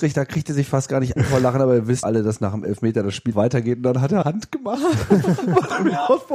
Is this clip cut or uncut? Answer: cut